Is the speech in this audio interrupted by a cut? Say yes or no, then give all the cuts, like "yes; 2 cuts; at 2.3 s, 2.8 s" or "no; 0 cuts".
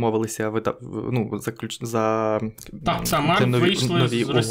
yes; 1 cut; at 3.4 s